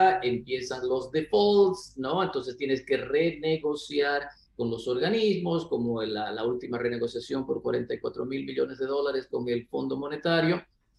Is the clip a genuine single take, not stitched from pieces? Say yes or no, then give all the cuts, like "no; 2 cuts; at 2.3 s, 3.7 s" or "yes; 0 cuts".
yes; 0 cuts